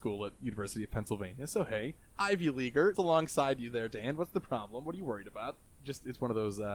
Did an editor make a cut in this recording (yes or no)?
yes